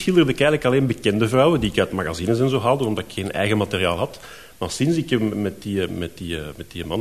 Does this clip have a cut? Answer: no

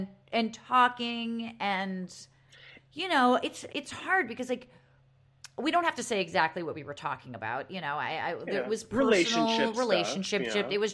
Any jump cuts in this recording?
yes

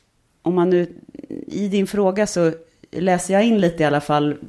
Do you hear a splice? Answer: no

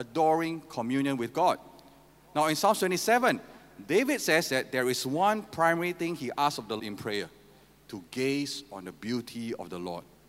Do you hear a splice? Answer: yes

